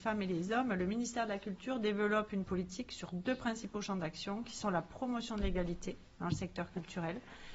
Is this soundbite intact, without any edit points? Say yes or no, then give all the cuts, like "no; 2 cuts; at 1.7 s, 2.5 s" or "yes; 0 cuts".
yes; 0 cuts